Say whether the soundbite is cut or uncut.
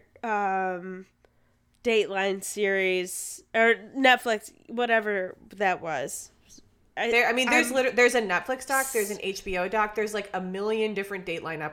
uncut